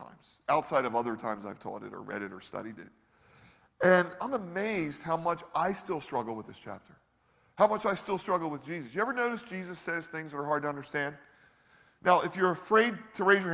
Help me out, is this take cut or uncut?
uncut